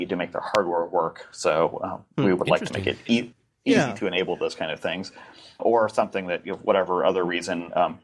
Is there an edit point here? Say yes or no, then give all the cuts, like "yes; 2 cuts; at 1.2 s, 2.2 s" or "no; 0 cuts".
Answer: yes; 1 cut; at 5.6 s